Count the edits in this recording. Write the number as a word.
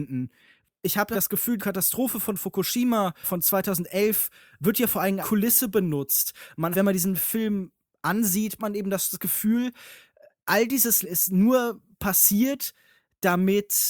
seven